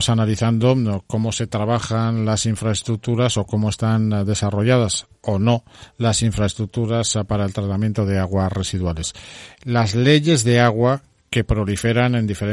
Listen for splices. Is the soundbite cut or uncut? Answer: uncut